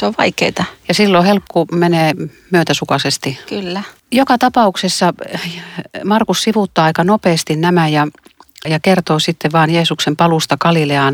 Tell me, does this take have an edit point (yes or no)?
yes